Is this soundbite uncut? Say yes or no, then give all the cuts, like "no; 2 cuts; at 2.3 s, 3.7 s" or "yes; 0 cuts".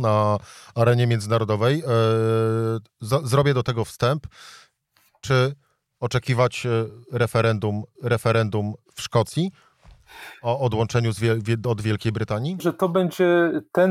no; 2 cuts; at 8.0 s, 12.6 s